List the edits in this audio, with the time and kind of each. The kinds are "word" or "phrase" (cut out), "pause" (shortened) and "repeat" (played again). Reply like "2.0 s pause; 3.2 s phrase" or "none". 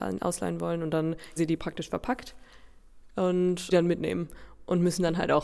1.4 s word; 3.7 s phrase